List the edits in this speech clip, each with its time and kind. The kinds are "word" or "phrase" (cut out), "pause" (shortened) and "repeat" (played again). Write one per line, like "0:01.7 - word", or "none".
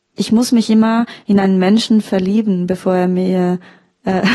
none